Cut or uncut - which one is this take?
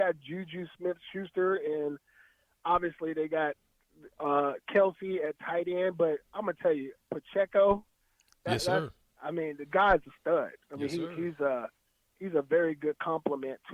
uncut